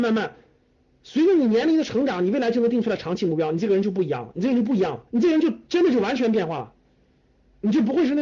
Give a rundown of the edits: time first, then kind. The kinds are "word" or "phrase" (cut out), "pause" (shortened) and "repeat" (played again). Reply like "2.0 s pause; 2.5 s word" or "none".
5.1 s pause